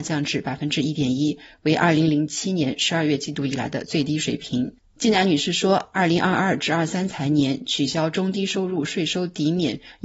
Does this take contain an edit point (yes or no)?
no